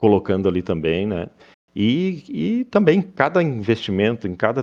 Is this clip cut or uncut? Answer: uncut